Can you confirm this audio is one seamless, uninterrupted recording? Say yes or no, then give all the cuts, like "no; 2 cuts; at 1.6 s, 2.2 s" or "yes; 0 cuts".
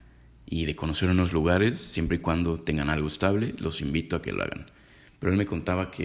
yes; 0 cuts